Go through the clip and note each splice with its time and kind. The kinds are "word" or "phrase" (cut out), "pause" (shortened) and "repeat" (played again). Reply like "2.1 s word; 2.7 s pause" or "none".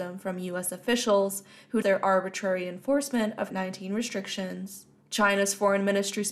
1.8 s word; 3.5 s word